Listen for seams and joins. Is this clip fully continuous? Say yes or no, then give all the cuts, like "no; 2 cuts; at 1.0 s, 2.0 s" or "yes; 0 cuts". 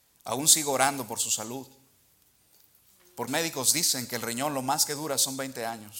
no; 1 cut; at 3.3 s